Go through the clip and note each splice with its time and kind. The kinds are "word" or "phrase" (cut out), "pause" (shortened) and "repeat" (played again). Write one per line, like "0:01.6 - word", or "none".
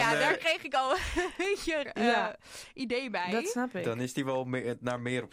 0:01.9 - word